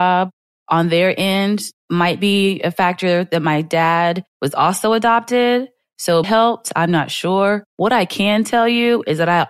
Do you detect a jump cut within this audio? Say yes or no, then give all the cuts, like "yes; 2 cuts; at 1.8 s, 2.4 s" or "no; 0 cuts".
yes; 4 cuts; at 1.8 s, 4.3 s, 6.2 s, 7.7 s